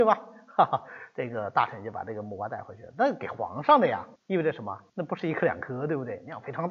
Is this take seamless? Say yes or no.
no